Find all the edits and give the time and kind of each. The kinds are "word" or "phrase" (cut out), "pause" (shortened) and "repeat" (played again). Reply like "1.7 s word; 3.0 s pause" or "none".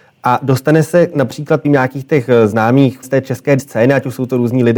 1.6 s word; 3.0 s word; 3.6 s word